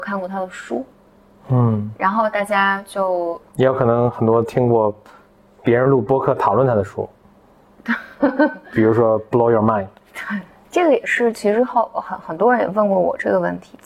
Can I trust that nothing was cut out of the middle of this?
yes; 0 cuts

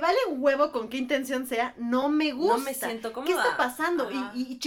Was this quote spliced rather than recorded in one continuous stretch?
no; 0 cuts

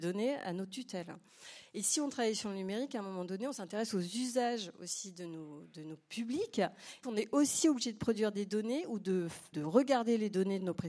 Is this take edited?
yes; 2 cuts; at 7.0 s, 9.5 s

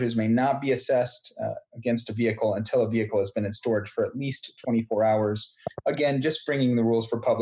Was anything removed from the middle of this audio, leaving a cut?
no; 0 cuts

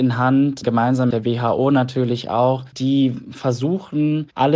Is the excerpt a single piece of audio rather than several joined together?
no; 1 cut; at 1.1 s

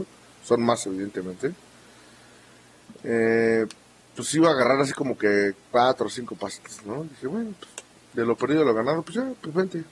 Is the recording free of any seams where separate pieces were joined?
yes; 0 cuts

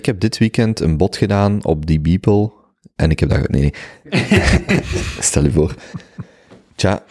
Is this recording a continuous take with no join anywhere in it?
yes; 0 cuts

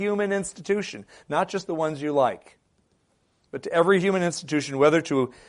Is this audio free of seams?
yes; 0 cuts

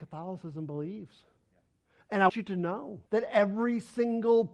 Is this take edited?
yes; 2 cuts; at 2.3 s, 3.1 s

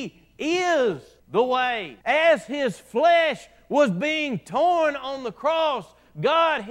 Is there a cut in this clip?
yes; 2 cuts; at 1.2 s, 2.0 s

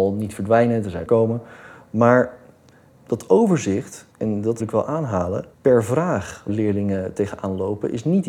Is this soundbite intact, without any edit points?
no; 6 cuts; at 1.0 s, 2.9 s, 4.1 s, 4.6 s, 5.5 s, 6.5 s

